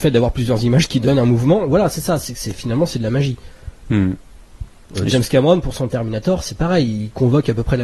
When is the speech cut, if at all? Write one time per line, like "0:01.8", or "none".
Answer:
none